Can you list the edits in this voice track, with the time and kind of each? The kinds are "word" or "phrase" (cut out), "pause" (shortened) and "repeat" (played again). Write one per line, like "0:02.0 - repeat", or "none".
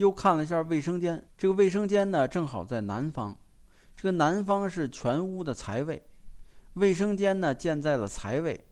0:01.3 - pause